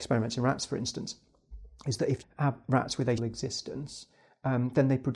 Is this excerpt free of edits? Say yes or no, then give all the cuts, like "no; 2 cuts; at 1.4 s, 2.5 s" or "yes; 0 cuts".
no; 2 cuts; at 2.2 s, 3.2 s